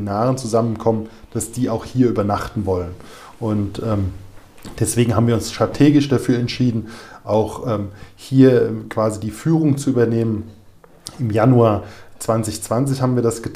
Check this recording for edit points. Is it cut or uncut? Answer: uncut